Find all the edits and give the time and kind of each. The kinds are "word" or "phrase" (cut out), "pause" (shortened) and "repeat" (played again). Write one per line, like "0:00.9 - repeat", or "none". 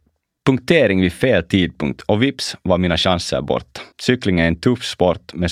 0:03.9 - pause